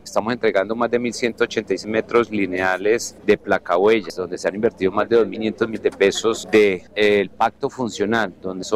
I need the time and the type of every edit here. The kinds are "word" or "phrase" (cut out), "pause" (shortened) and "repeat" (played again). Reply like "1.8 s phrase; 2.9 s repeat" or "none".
none